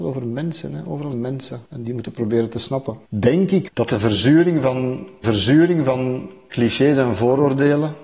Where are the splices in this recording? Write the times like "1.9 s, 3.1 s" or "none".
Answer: 1.1 s, 1.7 s, 3.1 s, 3.7 s, 5.2 s